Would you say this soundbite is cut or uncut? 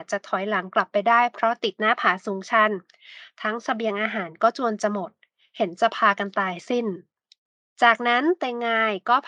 uncut